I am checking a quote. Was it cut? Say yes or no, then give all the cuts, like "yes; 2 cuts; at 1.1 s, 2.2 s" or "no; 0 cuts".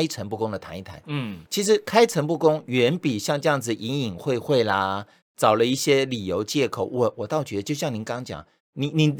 yes; 1 cut; at 1.5 s